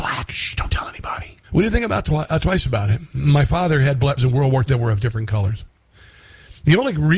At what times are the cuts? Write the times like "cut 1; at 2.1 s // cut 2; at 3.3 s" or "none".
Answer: cut 1; at 1.4 s // cut 2; at 4.2 s // cut 3; at 4.7 s